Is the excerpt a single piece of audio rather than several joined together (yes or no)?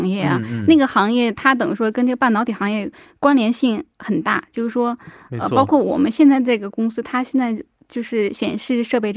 yes